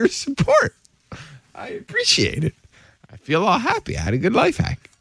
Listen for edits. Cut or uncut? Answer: uncut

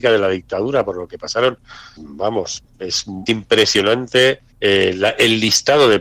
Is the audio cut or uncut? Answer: cut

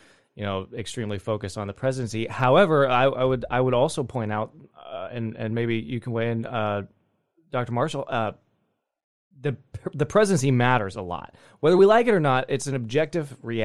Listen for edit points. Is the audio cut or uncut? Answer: uncut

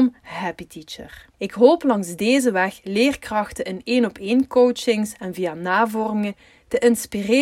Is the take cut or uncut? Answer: cut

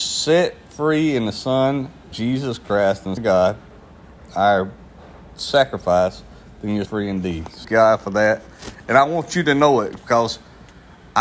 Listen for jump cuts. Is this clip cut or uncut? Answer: cut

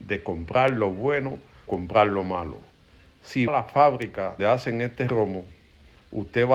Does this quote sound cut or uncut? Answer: cut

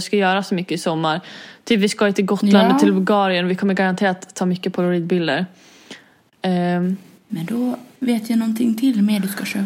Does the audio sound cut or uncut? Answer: uncut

